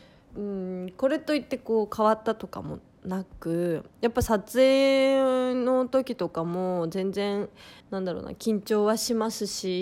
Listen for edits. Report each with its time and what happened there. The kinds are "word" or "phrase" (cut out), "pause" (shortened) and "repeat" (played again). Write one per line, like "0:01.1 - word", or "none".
0:03.9 - pause
0:07.8 - pause